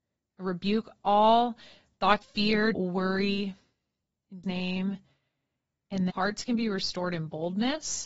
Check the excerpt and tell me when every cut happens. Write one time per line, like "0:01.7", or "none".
0:02.2
0:02.7
0:04.4
0:06.1